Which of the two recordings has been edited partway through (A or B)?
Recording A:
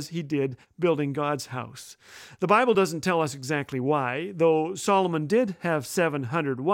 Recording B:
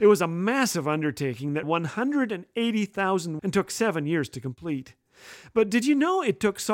B